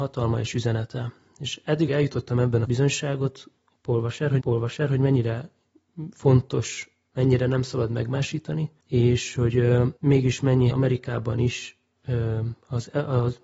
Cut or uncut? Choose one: cut